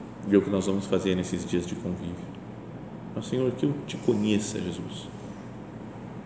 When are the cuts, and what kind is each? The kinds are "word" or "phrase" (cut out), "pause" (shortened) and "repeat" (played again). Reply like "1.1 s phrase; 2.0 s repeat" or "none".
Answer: none